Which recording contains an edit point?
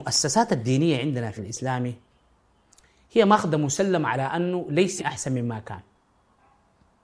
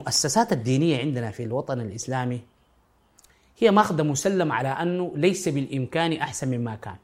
first; 2 cuts; at 1.4 s, 5.0 s

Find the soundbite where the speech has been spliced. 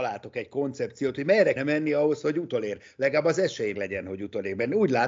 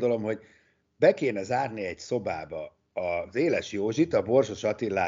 first; 2 cuts; at 1.6 s, 3.7 s

